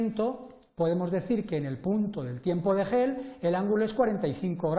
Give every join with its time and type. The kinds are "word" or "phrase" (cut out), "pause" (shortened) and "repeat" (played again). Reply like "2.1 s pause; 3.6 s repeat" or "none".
none